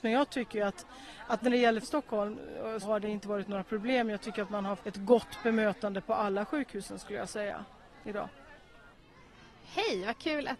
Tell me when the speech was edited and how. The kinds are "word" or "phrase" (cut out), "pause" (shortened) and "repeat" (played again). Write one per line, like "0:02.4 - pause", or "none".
0:01.8 - word
0:02.8 - word
0:04.8 - word